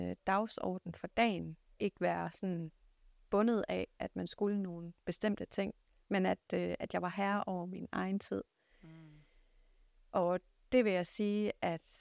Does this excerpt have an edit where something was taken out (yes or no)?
yes